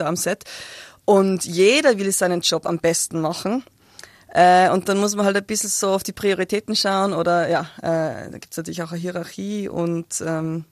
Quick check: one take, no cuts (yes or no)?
yes